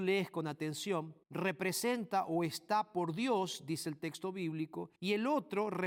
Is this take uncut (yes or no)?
no